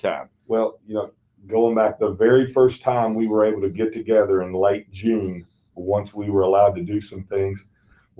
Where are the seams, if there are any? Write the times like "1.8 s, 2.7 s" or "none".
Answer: none